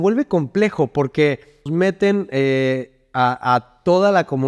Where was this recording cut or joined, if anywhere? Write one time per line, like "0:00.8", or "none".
0:01.7